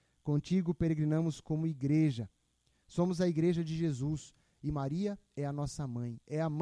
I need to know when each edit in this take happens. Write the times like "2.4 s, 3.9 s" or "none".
none